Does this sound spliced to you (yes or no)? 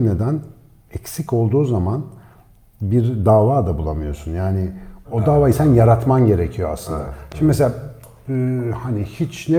no